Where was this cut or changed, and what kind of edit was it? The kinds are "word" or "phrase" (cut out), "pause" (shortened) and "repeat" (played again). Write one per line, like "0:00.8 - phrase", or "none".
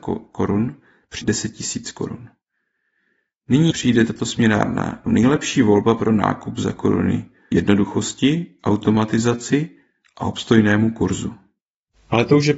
0:01.2 - word
0:03.7 - word
0:05.1 - word
0:07.5 - word

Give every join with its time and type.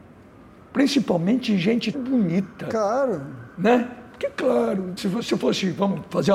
0:01.9 - word
0:03.5 - pause
0:05.0 - word

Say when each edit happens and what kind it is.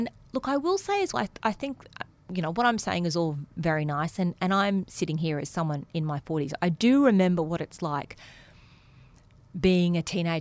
0:01.1 - word

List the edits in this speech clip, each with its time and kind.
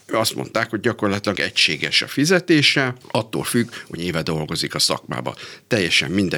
0:01.3 - word
0:03.0 - pause
0:04.0 - word

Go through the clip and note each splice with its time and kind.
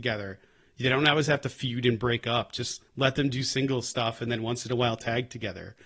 0:02.9 - pause

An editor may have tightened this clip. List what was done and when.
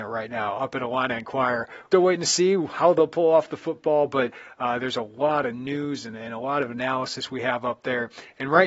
0:01.9 - word

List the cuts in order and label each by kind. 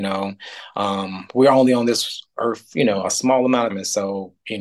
0:03.7 - word

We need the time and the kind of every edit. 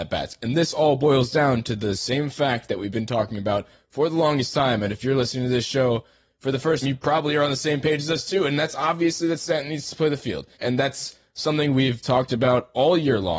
0:06.8 - word
0:10.5 - pause

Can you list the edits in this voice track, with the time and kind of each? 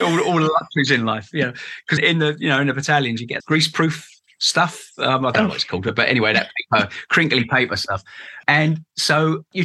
0:02.0 - word
0:03.4 - word

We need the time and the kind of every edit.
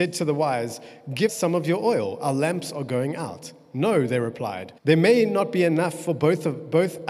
0:01.3 - word
0:04.8 - pause

